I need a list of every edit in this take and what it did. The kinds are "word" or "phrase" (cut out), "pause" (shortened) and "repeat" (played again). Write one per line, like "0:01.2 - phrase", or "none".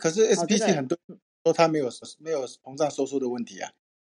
0:02.0 - repeat